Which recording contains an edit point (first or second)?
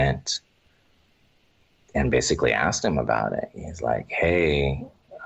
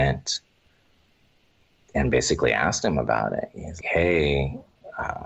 second